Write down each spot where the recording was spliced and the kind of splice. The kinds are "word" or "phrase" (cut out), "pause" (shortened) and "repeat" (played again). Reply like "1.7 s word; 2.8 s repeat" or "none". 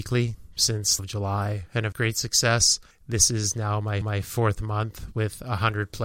1.0 s word; 1.9 s word; 2.9 s pause; 4.0 s repeat